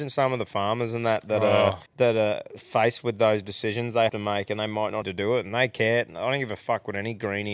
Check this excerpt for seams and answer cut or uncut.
cut